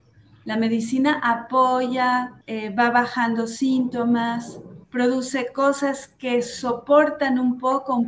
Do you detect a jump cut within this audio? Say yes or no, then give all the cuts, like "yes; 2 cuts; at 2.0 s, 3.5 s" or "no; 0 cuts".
yes; 2 cuts; at 2.4 s, 4.8 s